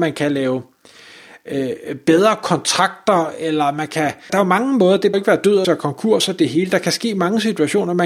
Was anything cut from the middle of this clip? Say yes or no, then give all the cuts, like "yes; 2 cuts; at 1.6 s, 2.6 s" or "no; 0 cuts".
yes; 3 cuts; at 4.3 s, 5.1 s, 5.6 s